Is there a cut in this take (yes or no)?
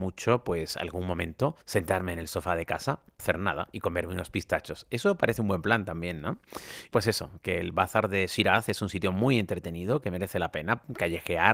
yes